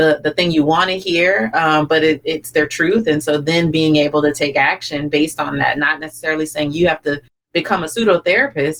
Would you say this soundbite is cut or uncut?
uncut